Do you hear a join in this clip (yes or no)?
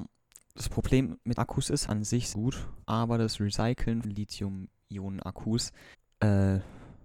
yes